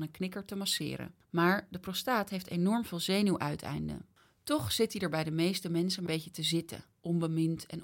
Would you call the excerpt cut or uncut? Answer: cut